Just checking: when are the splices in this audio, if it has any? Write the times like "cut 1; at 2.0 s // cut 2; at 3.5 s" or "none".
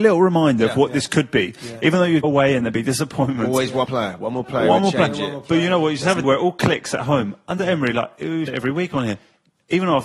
cut 1; at 2.2 s // cut 2; at 3.8 s // cut 3; at 6.2 s // cut 4; at 8.5 s